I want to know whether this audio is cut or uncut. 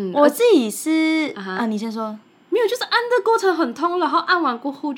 uncut